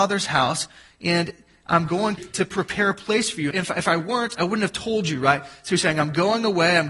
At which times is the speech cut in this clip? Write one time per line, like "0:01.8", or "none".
0:02.2
0:03.5